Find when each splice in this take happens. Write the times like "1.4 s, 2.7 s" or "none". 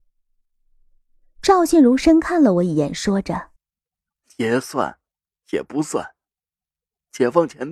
3.6 s